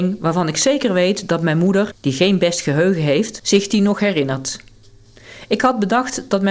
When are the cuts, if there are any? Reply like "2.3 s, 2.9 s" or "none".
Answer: none